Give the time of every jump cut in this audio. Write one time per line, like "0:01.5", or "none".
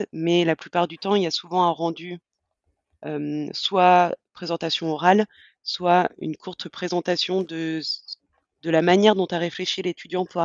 none